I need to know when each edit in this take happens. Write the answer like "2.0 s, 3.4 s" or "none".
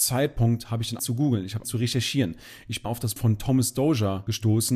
1.0 s, 1.6 s, 2.8 s, 3.2 s